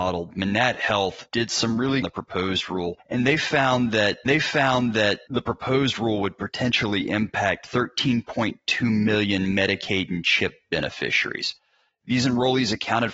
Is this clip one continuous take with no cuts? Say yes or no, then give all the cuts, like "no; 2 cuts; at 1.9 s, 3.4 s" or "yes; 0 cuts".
no; 2 cuts; at 2.0 s, 4.3 s